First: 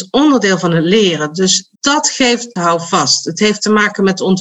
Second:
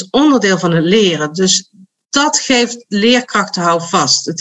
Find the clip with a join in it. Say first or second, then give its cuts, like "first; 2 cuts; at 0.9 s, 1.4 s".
first; 2 cuts; at 1.7 s, 2.6 s